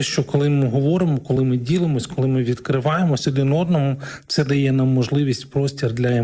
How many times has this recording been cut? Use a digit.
0